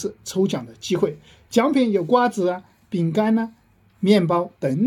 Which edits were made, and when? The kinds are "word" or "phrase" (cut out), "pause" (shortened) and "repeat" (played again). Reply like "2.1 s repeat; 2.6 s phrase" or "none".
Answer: none